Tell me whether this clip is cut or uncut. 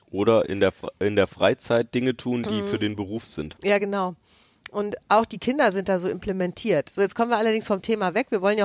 uncut